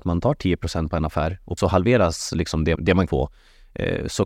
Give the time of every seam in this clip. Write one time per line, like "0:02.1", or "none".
0:01.6
0:02.8
0:03.1